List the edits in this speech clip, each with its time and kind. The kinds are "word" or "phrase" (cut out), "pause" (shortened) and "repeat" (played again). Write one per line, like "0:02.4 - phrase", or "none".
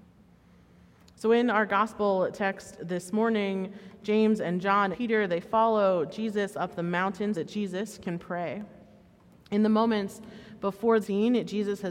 0:04.9 - word
0:07.3 - word
0:11.0 - word

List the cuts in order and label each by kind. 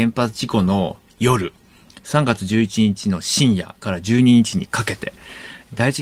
none

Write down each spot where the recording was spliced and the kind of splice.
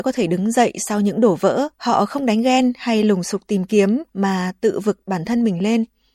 0:01.7 - pause
0:04.1 - pause

